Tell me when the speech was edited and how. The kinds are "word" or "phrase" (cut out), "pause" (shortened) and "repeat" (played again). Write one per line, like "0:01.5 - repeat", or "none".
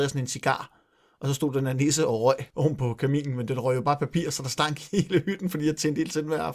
0:02.5 - pause